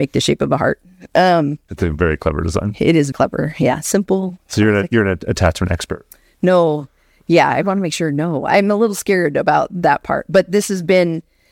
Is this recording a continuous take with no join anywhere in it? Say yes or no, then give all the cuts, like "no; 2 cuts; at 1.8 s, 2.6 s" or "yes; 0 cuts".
no; 1 cut; at 3.1 s